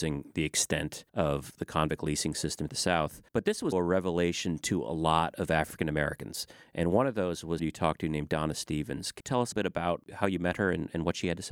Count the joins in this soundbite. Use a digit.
7